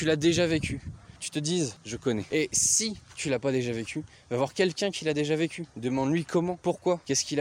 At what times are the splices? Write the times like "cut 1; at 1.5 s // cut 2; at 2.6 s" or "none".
cut 1; at 1.2 s